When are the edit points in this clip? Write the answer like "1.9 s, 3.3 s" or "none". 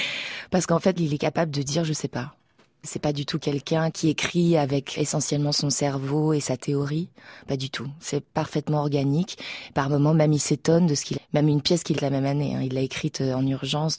1.0 s, 5.0 s, 11.2 s, 12.0 s